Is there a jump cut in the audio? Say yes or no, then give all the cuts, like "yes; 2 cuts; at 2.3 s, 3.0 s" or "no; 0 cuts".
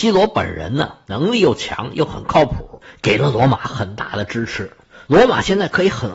no; 0 cuts